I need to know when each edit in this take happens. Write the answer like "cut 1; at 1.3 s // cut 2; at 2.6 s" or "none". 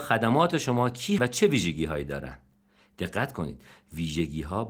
cut 1; at 1.2 s